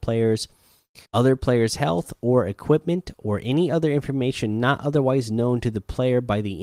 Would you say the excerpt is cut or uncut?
cut